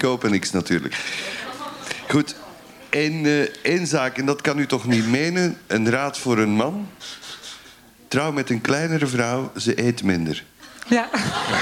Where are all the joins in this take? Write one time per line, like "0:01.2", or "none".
none